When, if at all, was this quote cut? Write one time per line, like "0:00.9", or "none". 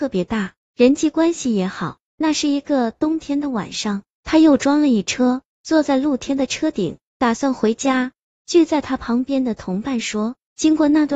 none